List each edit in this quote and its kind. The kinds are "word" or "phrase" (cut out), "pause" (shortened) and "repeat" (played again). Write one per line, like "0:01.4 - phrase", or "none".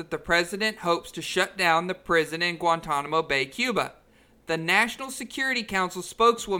none